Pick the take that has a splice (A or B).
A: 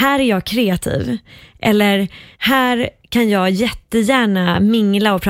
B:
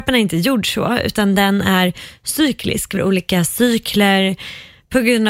B